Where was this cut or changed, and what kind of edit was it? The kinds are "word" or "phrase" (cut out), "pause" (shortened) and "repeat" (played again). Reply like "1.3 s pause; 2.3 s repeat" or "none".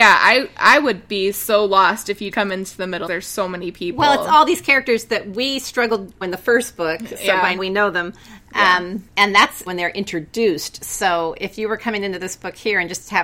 2.3 s word; 3.1 s phrase; 6.2 s phrase; 7.6 s word; 9.1 s pause; 9.7 s word